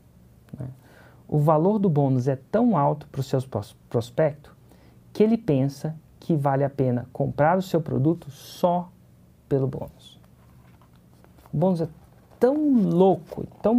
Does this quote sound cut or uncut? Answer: cut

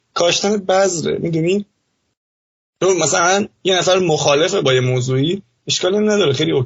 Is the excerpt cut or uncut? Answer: uncut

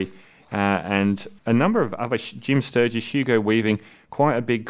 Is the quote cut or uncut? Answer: cut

